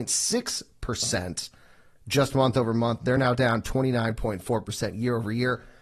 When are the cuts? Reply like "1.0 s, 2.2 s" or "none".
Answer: none